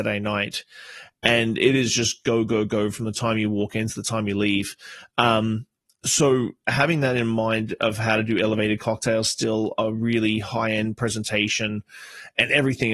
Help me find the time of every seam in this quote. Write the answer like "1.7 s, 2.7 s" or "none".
none